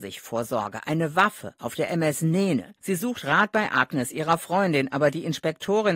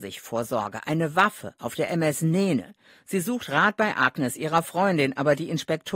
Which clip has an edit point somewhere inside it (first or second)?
first